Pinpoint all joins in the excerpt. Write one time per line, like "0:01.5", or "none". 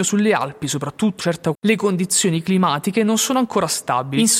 0:01.2
0:01.5